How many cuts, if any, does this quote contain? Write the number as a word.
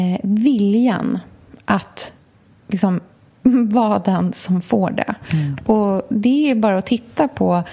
zero